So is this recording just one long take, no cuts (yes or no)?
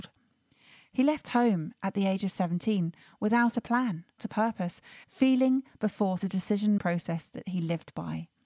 no